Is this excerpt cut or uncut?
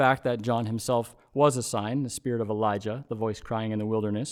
uncut